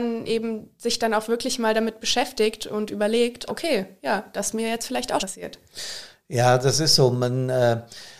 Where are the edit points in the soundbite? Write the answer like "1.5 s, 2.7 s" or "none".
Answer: 3.5 s, 5.2 s